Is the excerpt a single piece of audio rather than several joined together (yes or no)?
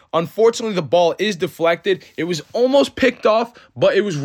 yes